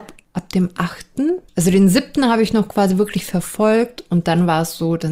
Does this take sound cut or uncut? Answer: cut